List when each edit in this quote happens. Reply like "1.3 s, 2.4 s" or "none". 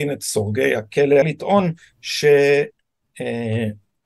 1.2 s